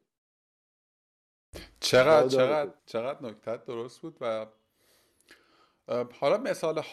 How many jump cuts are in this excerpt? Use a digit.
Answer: 1